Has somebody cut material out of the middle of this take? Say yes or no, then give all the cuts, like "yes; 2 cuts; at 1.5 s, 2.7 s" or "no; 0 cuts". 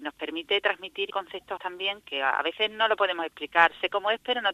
yes; 3 cuts; at 1.1 s, 1.6 s, 2.0 s